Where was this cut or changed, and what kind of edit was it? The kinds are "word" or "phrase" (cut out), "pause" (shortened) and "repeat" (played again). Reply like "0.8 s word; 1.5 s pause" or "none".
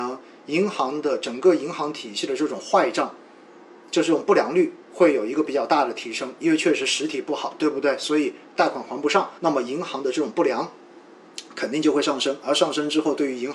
4.8 s pause; 9.4 s pause